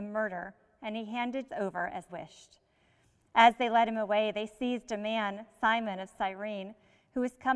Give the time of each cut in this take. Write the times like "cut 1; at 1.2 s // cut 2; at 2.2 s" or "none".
cut 1; at 1.5 s // cut 2; at 2.1 s